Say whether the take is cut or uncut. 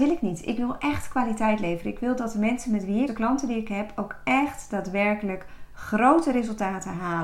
cut